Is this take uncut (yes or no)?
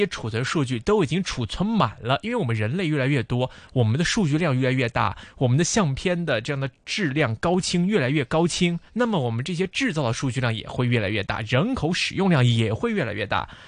no